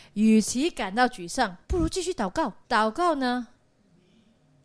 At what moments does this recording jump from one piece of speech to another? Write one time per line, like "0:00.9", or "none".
0:01.6
0:02.6